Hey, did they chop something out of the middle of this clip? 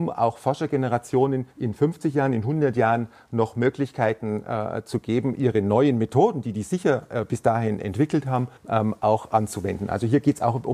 yes; 2 cuts; at 1.5 s, 8.6 s

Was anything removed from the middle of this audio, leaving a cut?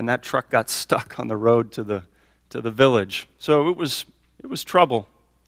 no; 0 cuts

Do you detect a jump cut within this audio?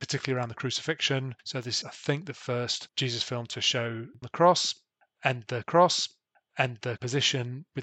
yes; 3 cuts; at 1.8 s, 4.2 s, 5.6 s

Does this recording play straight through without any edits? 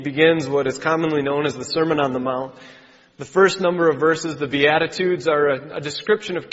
yes; 0 cuts

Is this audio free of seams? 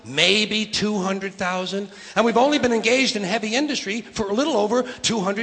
yes; 0 cuts

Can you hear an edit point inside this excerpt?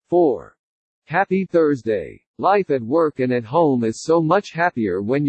yes; 1 cut; at 2.3 s

